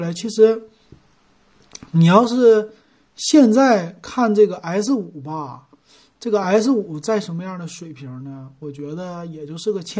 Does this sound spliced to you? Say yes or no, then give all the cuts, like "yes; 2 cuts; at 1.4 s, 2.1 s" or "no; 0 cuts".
no; 0 cuts